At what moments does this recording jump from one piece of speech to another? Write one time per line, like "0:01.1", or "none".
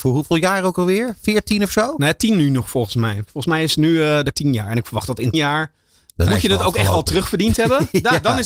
0:04.3
0:05.3
0:06.3